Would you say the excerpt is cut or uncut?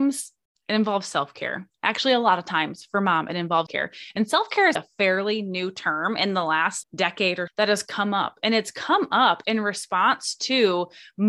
cut